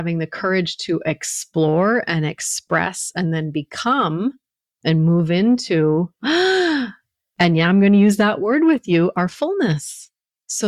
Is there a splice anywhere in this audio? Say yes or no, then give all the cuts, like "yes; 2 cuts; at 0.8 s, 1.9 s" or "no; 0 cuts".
no; 0 cuts